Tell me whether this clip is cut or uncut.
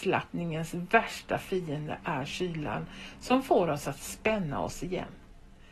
uncut